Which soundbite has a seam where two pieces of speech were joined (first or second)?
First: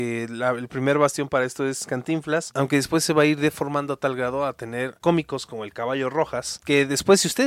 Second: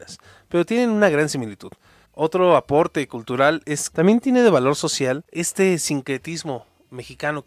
second